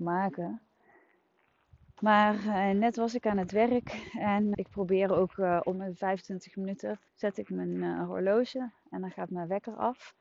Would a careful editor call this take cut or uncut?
cut